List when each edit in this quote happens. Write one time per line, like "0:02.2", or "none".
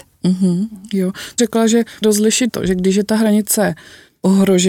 0:01.4
0:02.0
0:02.5